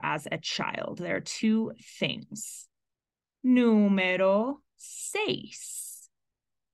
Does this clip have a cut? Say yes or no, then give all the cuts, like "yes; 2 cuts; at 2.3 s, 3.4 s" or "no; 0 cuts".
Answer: yes; 1 cut; at 2.9 s